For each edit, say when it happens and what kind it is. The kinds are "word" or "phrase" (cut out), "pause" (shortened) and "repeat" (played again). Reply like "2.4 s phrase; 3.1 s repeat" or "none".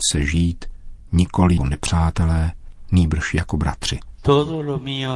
1.6 s word